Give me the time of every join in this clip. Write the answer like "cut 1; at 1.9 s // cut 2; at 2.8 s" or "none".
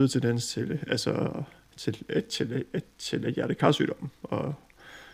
none